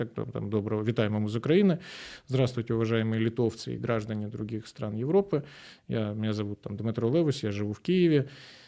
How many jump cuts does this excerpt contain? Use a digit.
0